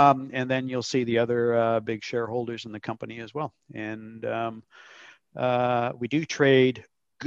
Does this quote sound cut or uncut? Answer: uncut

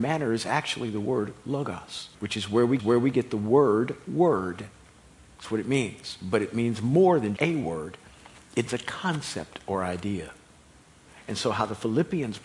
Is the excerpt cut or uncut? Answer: cut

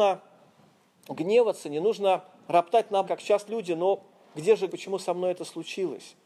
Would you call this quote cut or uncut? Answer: cut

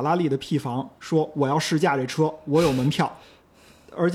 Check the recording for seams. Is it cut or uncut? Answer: cut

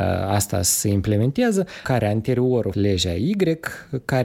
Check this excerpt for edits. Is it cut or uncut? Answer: cut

